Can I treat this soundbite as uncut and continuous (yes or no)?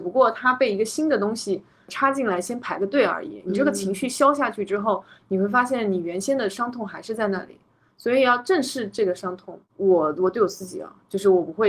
no